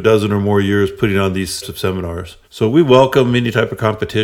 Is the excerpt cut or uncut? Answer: cut